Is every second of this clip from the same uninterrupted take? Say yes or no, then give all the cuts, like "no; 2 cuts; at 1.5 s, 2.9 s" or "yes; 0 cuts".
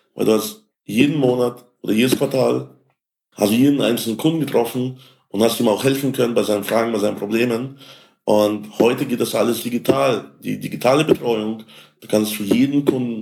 yes; 0 cuts